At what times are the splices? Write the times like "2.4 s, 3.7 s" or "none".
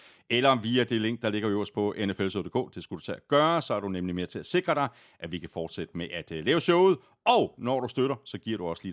none